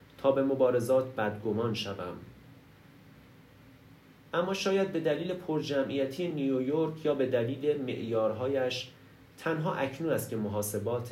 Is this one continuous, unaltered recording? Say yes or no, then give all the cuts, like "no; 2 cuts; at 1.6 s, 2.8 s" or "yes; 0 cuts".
yes; 0 cuts